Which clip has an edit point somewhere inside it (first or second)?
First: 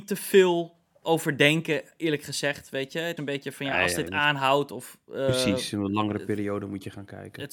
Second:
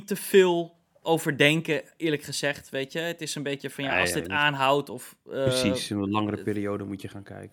first